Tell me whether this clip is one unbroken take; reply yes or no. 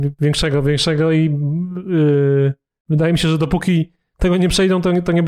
yes